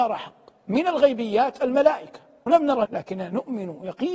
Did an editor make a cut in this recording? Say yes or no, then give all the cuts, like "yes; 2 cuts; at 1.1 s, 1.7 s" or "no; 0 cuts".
yes; 2 cuts; at 2.5 s, 2.9 s